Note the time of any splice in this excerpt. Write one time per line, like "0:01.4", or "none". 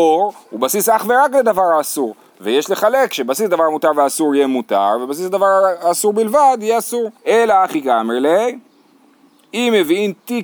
0:07.2